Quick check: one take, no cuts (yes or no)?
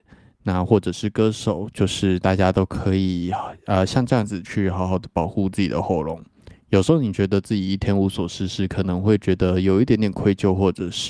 yes